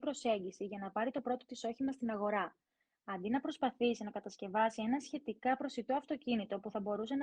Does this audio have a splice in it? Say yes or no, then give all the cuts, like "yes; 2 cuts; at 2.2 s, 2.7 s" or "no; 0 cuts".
no; 0 cuts